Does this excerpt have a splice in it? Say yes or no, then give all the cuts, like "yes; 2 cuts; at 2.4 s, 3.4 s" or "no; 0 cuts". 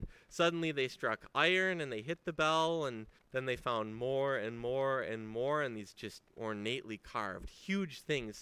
yes; 2 cuts; at 3.2 s, 6.3 s